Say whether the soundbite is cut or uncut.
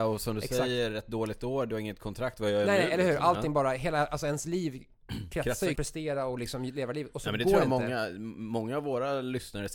cut